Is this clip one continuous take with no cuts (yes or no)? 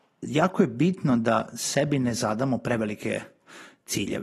yes